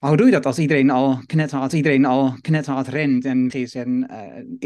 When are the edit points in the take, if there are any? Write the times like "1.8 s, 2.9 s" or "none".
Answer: 1.7 s, 3.5 s